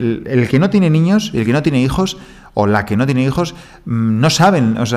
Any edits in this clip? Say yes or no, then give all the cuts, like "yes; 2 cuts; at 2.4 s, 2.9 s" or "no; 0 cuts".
no; 0 cuts